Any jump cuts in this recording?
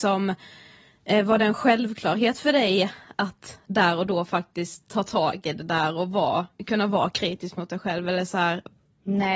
no; 0 cuts

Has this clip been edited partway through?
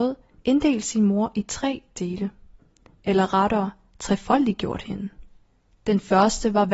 no; 0 cuts

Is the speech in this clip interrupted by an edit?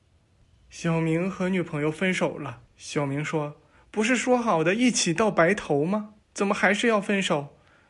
yes; 2 cuts; at 2.7 s, 6.2 s

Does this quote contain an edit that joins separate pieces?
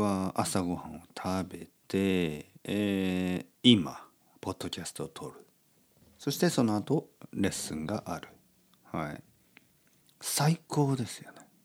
yes; 2 cuts; at 2.6 s, 3.6 s

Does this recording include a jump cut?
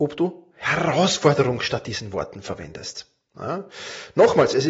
no; 0 cuts

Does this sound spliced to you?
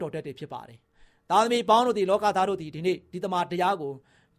no; 0 cuts

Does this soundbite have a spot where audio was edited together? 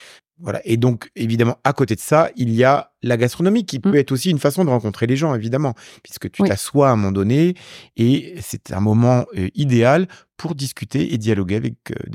no; 0 cuts

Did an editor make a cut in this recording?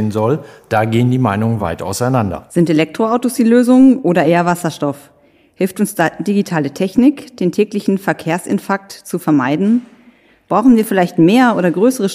no; 0 cuts

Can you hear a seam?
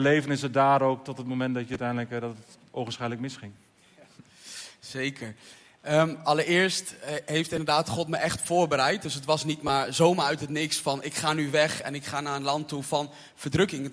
no; 0 cuts

